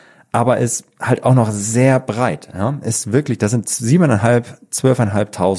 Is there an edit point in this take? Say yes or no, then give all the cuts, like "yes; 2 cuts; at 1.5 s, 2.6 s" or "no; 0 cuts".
no; 0 cuts